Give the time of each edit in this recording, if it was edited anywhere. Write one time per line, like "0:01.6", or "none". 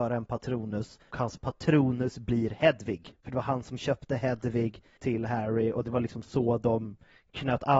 0:01.1
0:03.2
0:05.0